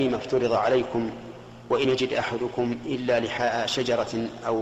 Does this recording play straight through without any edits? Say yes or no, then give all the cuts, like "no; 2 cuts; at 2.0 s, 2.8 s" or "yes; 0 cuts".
no; 1 cut; at 1.8 s